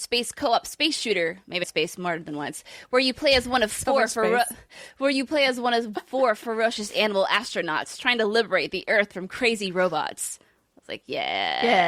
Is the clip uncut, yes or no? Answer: no